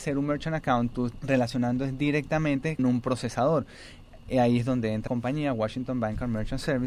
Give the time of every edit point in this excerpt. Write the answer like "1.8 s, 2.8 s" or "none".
1.1 s, 2.8 s, 5.1 s